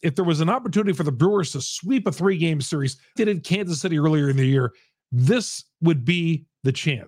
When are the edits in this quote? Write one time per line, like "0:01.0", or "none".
0:03.2